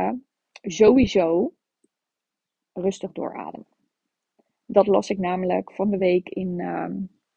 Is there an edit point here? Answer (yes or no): no